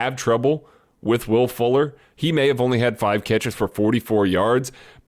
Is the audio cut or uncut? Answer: uncut